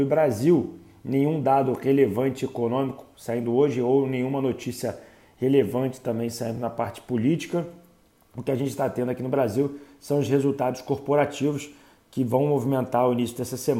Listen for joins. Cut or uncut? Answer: uncut